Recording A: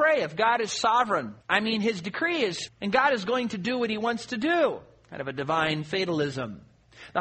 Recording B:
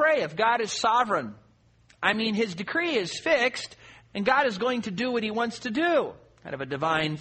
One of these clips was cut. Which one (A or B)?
A